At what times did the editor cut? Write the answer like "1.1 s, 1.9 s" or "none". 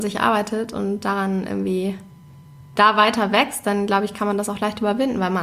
none